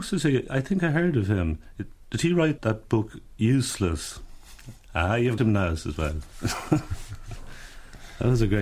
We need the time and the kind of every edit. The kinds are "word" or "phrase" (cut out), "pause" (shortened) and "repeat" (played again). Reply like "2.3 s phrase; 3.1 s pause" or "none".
2.6 s word; 5.4 s word